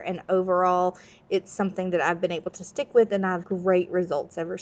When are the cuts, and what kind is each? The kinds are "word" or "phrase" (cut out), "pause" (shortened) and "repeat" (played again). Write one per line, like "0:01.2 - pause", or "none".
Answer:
0:03.4 - word